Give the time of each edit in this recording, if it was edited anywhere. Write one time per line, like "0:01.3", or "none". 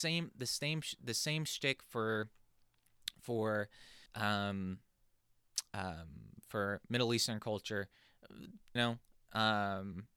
0:04.1
0:08.8